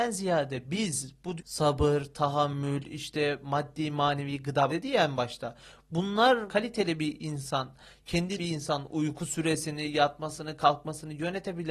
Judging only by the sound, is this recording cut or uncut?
cut